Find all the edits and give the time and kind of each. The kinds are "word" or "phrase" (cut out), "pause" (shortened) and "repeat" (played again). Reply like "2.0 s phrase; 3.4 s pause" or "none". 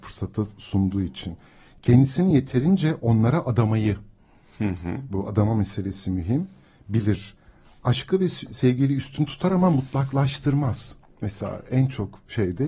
none